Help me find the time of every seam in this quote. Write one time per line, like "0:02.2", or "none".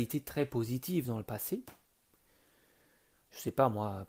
none